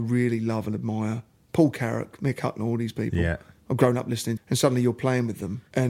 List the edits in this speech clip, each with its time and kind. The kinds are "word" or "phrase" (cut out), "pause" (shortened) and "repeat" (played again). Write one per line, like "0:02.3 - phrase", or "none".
0:04.4 - word